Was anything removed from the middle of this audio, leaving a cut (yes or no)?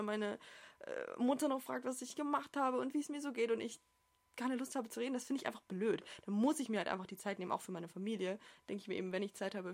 no